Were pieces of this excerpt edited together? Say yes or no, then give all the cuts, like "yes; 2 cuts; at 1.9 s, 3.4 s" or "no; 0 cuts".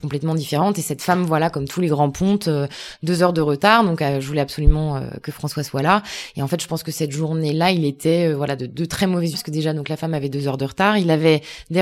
yes; 1 cut; at 9.3 s